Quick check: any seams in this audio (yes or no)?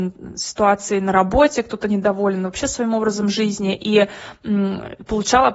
no